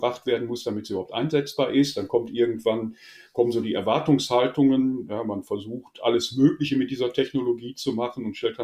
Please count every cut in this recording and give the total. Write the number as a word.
zero